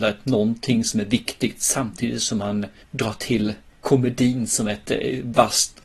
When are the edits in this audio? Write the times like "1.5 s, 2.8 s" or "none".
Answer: 2.8 s